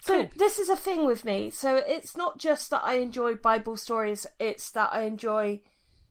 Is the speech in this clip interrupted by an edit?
no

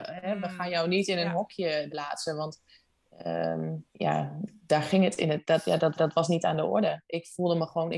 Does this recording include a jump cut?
yes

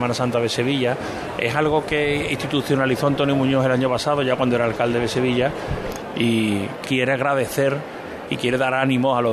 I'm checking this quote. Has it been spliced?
yes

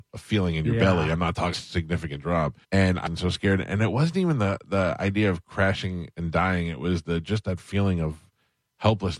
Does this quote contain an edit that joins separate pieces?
yes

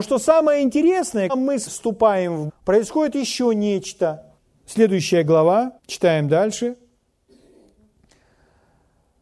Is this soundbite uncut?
no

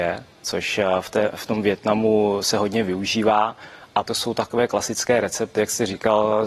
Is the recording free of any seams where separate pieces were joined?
no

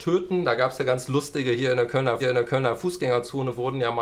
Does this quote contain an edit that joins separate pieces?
yes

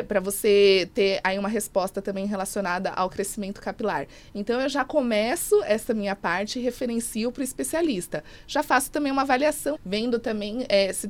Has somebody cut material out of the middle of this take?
yes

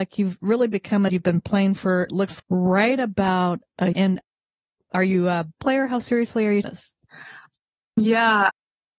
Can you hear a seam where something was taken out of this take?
yes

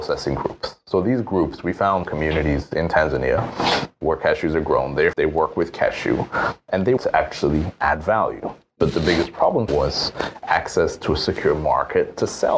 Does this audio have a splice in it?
yes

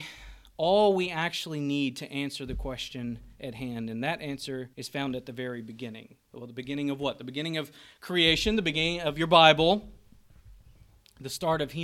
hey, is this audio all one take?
no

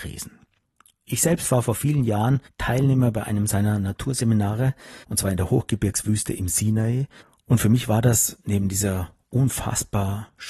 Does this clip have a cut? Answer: yes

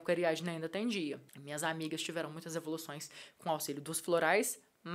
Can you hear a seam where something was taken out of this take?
yes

